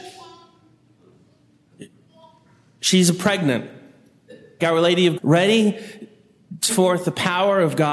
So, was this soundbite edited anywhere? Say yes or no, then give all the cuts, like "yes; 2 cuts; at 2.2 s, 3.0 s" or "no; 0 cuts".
yes; 3 cuts; at 4.6 s, 5.2 s, 6.7 s